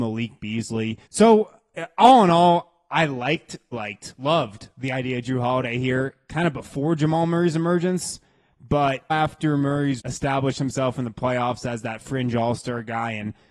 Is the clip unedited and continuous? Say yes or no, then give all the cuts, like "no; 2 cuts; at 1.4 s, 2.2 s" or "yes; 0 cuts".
no; 4 cuts; at 1.1 s, 3.7 s, 9.1 s, 10.0 s